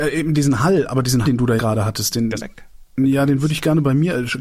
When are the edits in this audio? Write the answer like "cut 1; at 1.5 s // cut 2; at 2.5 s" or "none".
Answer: cut 1; at 1.2 s // cut 2; at 1.6 s // cut 3; at 2.4 s